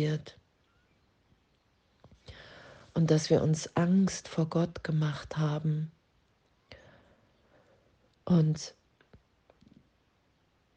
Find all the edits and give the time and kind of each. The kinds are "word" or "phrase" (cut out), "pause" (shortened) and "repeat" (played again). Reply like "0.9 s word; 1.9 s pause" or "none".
none